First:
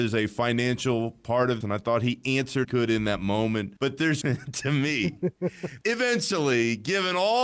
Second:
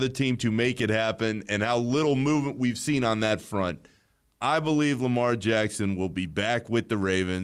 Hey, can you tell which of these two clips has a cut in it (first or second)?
first